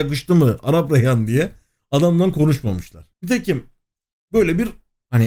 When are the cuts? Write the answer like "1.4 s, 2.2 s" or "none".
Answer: 3.1 s

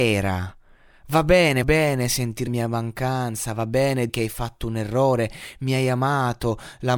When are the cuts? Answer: 1.6 s, 2.5 s, 4.1 s

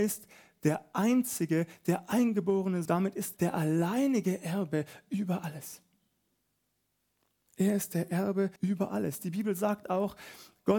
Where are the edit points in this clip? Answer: 2.9 s, 3.4 s, 8.6 s

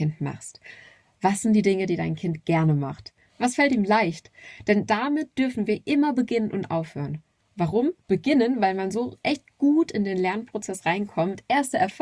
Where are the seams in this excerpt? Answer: 8.0 s

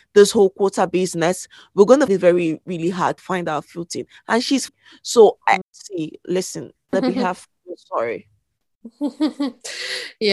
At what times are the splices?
2.1 s, 3.2 s, 4.7 s, 5.6 s, 6.9 s

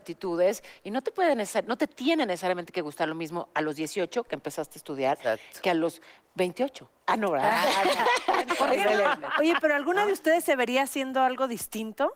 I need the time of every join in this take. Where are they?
none

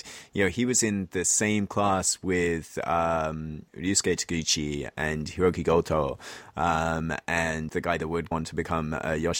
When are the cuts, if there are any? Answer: 3.7 s, 7.7 s, 8.3 s

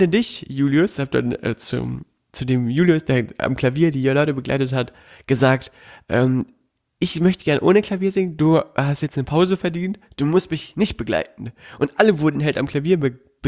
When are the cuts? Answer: none

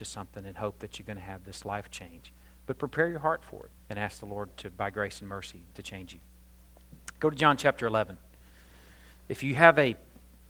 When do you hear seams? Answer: 3.8 s

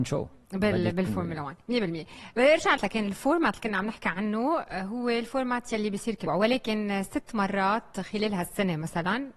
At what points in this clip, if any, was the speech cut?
2.8 s, 6.3 s

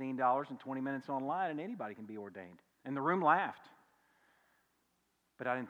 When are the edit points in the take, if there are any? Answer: 2.7 s

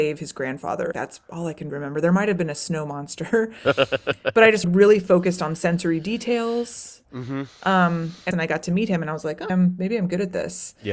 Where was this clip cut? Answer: 0.9 s, 1.7 s, 4.6 s, 8.3 s, 9.5 s

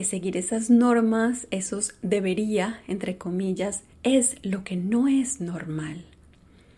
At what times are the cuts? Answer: 3.9 s

